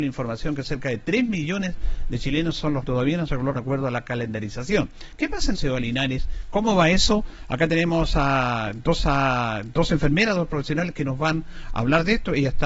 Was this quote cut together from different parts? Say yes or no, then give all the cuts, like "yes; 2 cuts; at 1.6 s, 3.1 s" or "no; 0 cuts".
yes; 4 cuts; at 2.8 s, 3.6 s, 5.5 s, 9.0 s